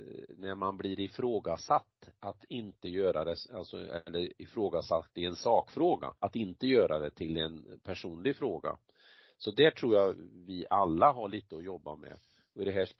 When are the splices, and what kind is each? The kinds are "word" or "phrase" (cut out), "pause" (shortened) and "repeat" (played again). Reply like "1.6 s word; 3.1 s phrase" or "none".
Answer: 6.2 s pause; 7.8 s pause